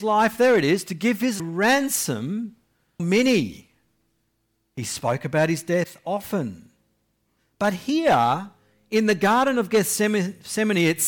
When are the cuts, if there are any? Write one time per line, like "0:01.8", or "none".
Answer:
0:01.4
0:03.0